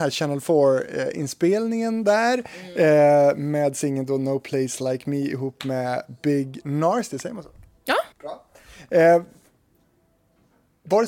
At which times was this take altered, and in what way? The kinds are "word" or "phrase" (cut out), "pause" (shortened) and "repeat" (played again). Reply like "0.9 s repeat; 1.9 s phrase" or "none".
8.1 s pause

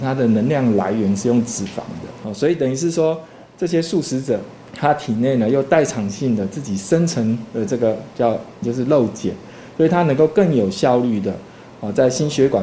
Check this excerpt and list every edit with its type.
8.6 s word

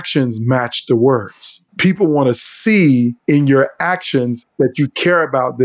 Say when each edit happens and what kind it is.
1.7 s pause; 3.2 s pause; 4.5 s pause

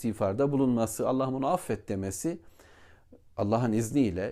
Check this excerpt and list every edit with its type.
none

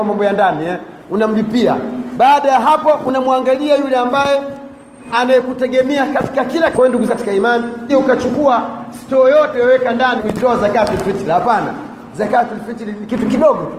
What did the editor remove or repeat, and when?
5.1 s word; 6.7 s word; 7.1 s word; 7.9 s word; 9.5 s word; 10.2 s word

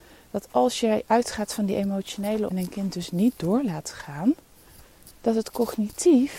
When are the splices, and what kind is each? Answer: 2.5 s word; 5.1 s pause

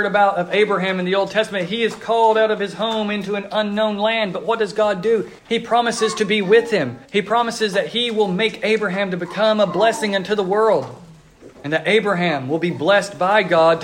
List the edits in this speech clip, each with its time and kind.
5.4 s pause; 7.0 s pause; 11.5 s pause

